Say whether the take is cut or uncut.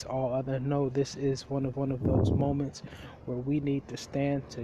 cut